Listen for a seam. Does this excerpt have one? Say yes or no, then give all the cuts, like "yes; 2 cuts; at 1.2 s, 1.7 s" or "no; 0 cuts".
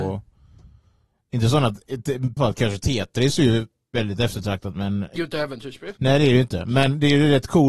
yes; 3 cuts; at 2.4 s, 5.2 s, 6.0 s